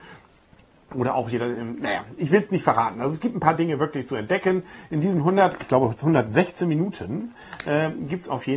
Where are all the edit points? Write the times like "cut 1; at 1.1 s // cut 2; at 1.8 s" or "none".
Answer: none

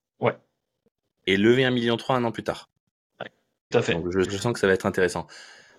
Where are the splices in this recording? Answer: cut 1; at 3.7 s // cut 2; at 4.2 s

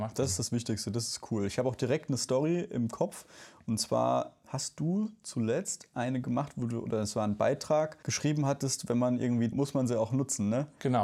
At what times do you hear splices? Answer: cut 1; at 9.5 s

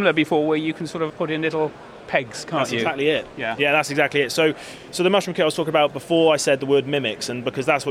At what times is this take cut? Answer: cut 1; at 1.1 s

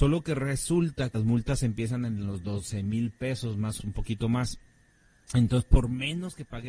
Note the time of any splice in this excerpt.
cut 1; at 1.1 s // cut 2; at 3.8 s

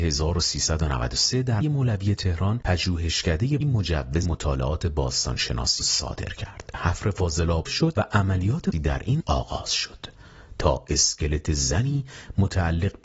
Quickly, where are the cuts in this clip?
cut 1; at 1.6 s // cut 2; at 3.6 s // cut 3; at 4.2 s // cut 4; at 5.8 s // cut 5; at 6.7 s // cut 6; at 7.7 s // cut 7; at 8.7 s // cut 8; at 9.2 s

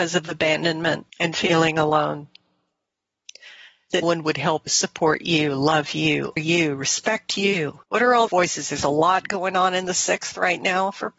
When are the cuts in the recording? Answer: cut 1; at 1.1 s // cut 2; at 4.0 s // cut 3; at 4.7 s // cut 4; at 6.4 s // cut 5; at 7.8 s // cut 6; at 8.3 s

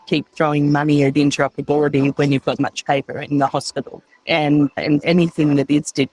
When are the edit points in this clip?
cut 1; at 2.6 s // cut 2; at 4.1 s // cut 3; at 5.0 s

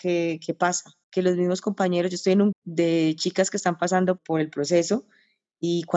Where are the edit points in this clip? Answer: cut 1; at 1.0 s // cut 2; at 2.5 s // cut 3; at 4.2 s

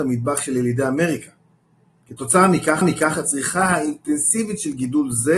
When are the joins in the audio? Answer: cut 1; at 2.8 s

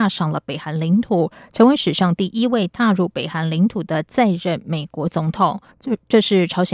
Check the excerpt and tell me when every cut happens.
cut 1; at 5.7 s

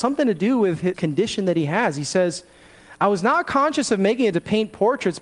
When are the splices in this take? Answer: cut 1; at 0.9 s // cut 2; at 4.3 s

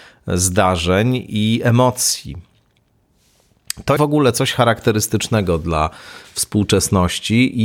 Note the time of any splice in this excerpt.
cut 1; at 4.0 s

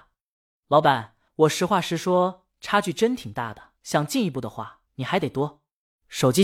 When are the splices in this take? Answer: cut 1; at 1.3 s // cut 2; at 3.8 s // cut 3; at 4.9 s

